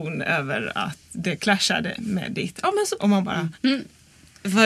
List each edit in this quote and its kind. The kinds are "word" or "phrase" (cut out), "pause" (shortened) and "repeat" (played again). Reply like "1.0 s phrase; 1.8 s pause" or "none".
3.0 s word; 3.5 s pause